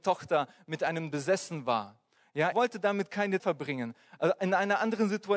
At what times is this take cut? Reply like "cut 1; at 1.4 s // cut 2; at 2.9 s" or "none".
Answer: cut 1; at 1.1 s // cut 2; at 2.5 s // cut 3; at 3.4 s